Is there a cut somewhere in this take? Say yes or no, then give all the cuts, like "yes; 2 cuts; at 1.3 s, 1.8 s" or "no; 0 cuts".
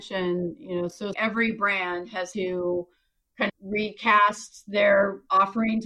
yes; 3 cuts; at 1.1 s, 2.3 s, 3.5 s